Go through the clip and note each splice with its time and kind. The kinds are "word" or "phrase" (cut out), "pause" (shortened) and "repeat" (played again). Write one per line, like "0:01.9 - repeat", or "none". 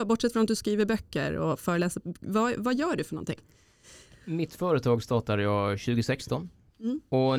none